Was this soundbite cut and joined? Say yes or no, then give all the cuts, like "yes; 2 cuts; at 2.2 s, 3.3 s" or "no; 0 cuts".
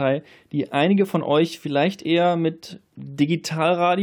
no; 0 cuts